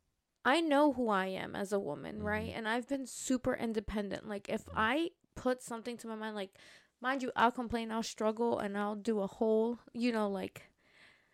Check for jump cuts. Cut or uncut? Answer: uncut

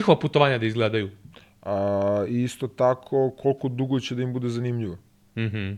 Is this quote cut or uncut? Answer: uncut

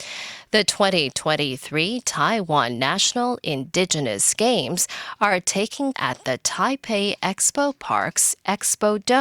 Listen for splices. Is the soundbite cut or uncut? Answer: cut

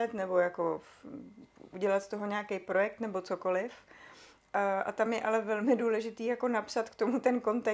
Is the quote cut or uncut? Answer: uncut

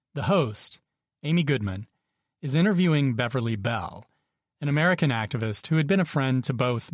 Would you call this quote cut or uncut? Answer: uncut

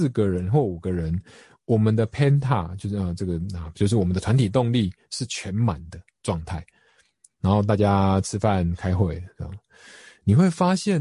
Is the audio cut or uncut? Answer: uncut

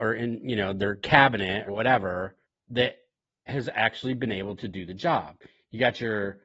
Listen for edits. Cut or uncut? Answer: cut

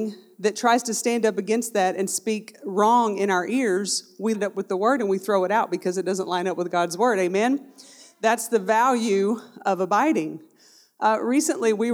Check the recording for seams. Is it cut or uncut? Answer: cut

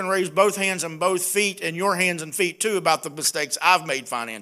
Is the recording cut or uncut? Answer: uncut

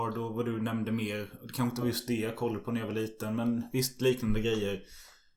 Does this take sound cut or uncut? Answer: uncut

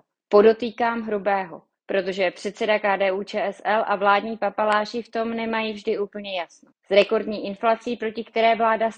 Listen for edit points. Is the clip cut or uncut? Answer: uncut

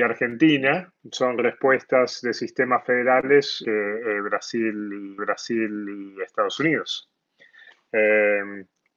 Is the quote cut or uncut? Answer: cut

